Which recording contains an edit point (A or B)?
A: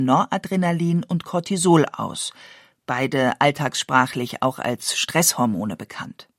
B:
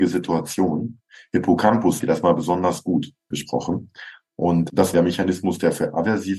B